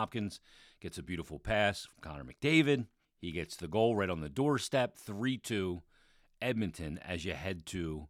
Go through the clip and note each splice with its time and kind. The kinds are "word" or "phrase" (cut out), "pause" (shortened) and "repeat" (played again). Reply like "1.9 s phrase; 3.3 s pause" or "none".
3.0 s pause